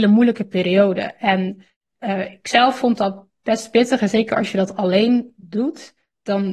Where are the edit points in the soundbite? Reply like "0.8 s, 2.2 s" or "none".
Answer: none